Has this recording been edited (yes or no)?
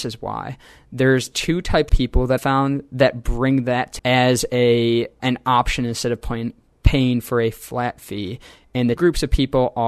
yes